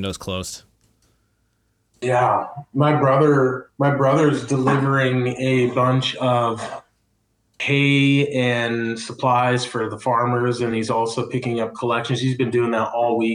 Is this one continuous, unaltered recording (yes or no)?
yes